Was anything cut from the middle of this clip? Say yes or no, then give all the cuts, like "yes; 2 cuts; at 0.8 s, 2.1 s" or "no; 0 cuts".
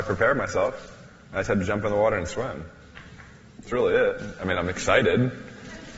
no; 0 cuts